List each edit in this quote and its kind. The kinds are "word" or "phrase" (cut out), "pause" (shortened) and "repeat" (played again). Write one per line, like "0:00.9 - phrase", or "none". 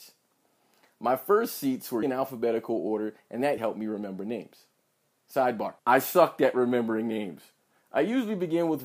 0:02.0 - word
0:03.6 - word
0:05.8 - pause